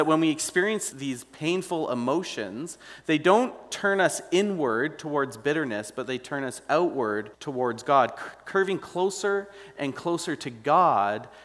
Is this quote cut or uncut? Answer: cut